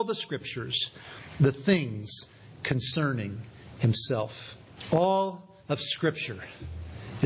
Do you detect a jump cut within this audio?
yes; 1 cut; at 5.6 s

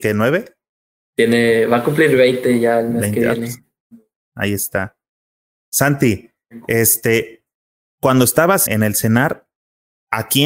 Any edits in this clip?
yes; 1 cut; at 8.7 s

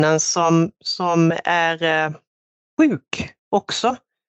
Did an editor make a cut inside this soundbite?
yes; 1 cut; at 3.4 s

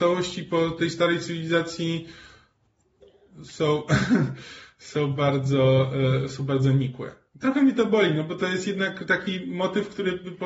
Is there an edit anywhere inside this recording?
no; 0 cuts

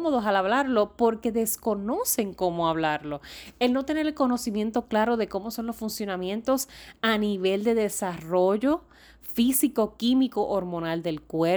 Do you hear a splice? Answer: no; 0 cuts

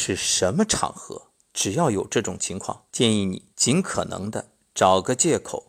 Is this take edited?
yes; 3 cuts; at 1.4 s, 2.9 s, 3.5 s

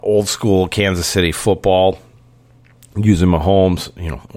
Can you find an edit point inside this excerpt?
no; 0 cuts

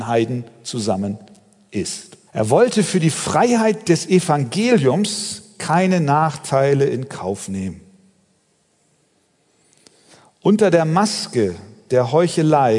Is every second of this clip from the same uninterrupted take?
no; 1 cut; at 2.3 s

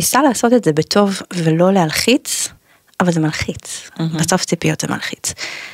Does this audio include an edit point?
no; 0 cuts

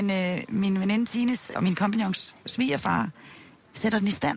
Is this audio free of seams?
no; 1 cut; at 1.5 s

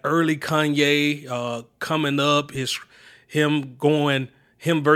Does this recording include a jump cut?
no; 0 cuts

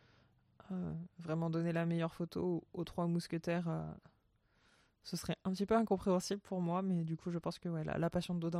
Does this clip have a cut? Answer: no; 0 cuts

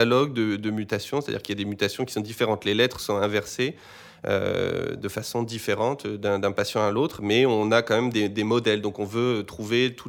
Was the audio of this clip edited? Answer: no; 0 cuts

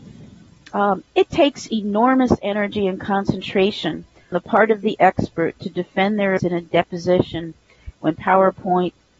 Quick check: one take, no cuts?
no; 3 cuts; at 4.3 s, 6.4 s, 8.2 s

